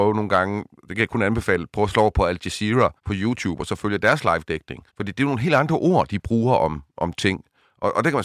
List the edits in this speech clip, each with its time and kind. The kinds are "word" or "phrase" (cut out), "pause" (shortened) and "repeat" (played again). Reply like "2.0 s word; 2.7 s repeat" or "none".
3.0 s pause; 4.9 s pause